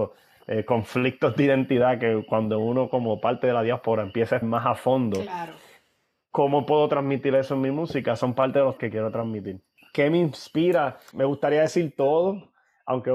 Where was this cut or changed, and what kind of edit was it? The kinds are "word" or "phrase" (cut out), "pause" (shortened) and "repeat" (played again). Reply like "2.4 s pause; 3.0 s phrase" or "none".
4.4 s word; 8.8 s word; 11.1 s word